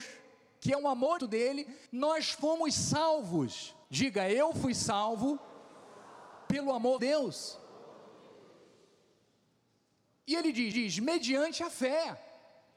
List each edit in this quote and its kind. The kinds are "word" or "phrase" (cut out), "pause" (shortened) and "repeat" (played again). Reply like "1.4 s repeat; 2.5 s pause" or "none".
1.2 s word; 1.9 s pause; 3.8 s pause; 7.0 s word; 10.7 s repeat